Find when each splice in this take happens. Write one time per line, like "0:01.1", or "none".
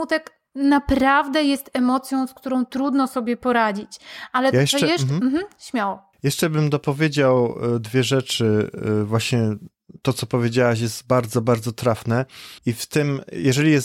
0:12.6